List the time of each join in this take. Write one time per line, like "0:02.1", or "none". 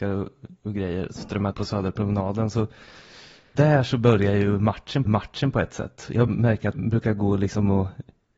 0:01.5
0:03.6
0:05.1
0:06.3
0:06.7